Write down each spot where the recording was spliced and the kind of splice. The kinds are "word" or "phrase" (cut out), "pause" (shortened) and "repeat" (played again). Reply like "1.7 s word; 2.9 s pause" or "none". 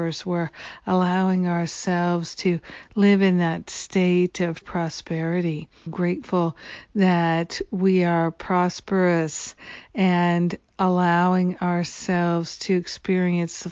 4.6 s word; 5.9 s word